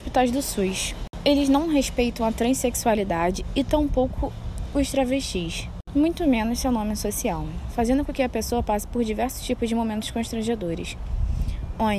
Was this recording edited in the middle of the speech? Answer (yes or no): no